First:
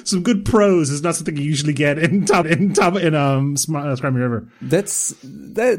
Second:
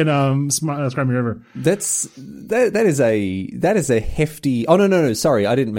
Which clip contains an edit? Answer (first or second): first